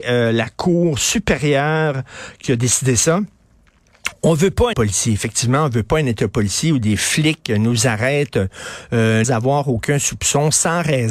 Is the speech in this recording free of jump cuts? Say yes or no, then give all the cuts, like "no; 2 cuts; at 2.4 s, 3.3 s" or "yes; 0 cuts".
no; 2 cuts; at 4.7 s, 9.2 s